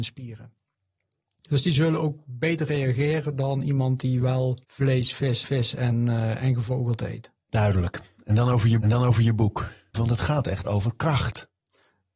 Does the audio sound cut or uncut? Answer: cut